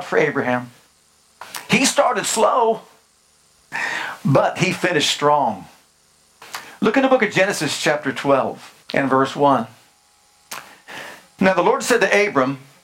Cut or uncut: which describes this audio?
cut